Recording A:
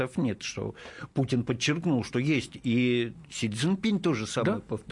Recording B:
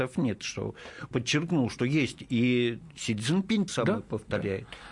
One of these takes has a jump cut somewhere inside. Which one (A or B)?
B